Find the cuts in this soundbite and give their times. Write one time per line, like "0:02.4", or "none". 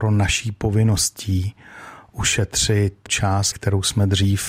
0:03.1
0:03.5